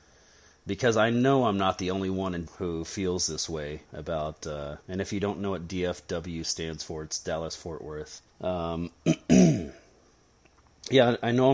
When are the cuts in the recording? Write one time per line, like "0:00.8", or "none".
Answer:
0:02.5
0:03.9
0:04.8
0:08.3